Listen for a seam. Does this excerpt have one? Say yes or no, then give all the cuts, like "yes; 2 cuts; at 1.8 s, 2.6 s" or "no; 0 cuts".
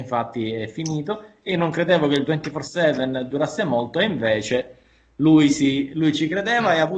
no; 0 cuts